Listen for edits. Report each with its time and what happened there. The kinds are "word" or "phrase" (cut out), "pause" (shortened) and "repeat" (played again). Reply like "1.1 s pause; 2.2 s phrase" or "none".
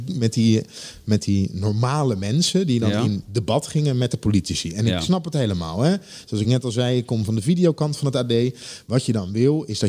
none